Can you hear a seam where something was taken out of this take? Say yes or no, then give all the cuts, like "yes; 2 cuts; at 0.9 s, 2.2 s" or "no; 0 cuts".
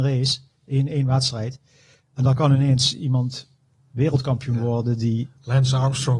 no; 0 cuts